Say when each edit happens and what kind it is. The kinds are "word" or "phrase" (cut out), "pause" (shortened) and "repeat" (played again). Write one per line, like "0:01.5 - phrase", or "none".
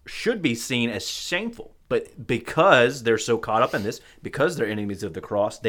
0:01.8 - pause